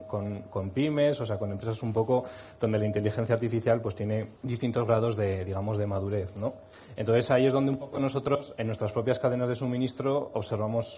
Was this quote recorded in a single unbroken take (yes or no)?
no